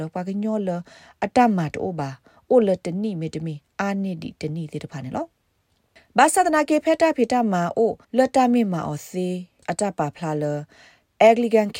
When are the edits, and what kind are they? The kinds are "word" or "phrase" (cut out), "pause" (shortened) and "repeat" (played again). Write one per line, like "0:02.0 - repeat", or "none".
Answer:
0:08.0 - pause